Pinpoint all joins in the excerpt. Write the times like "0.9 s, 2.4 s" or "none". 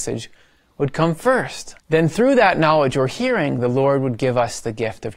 1.8 s